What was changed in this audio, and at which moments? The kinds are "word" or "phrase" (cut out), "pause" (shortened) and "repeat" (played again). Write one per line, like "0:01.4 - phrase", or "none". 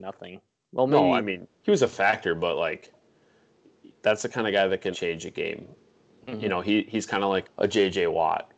0:04.9 - word
0:07.4 - word